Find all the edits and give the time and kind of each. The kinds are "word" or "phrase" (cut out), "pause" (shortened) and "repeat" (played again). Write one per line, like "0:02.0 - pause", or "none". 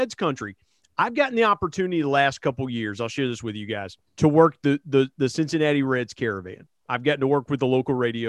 0:04.1 - pause